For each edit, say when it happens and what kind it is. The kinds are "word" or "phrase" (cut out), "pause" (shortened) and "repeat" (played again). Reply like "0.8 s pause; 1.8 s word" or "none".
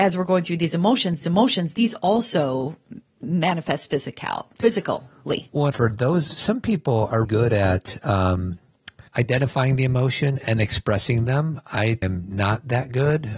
1.2 s repeat; 3.0 s pause; 5.7 s phrase; 6.3 s word; 7.2 s word; 9.1 s pause; 12.0 s word